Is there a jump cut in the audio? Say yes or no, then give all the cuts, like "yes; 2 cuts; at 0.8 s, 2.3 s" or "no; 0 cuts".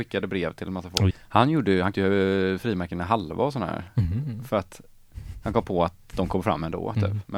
yes; 2 cuts; at 1.1 s, 1.9 s